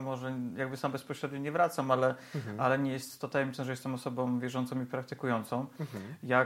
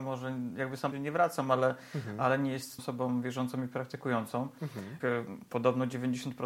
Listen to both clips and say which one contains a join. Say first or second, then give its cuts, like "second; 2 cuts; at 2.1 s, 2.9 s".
second; 3 cuts; at 0.9 s, 2.8 s, 5.0 s